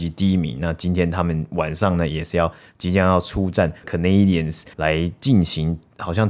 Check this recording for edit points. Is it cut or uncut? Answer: cut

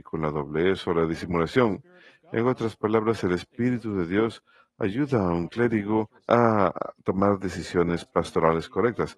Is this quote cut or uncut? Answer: cut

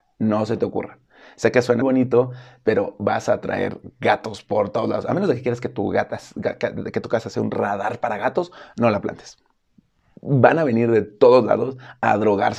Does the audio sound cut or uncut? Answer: cut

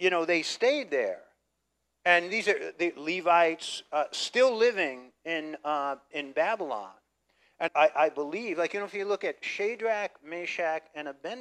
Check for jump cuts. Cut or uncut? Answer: cut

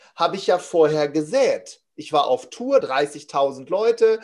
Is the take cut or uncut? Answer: cut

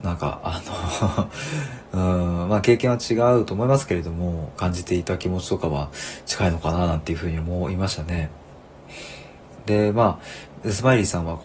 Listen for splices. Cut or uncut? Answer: cut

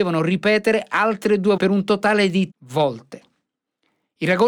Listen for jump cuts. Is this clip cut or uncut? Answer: cut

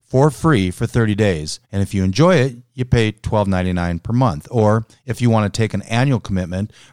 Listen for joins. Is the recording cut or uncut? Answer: cut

